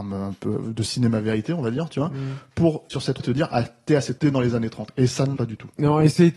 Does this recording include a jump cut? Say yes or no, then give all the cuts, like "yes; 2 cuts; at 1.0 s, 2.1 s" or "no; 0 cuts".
yes; 4 cuts; at 2.9 s, 3.2 s, 4.2 s, 5.4 s